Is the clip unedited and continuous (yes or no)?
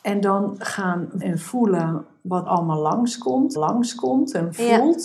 no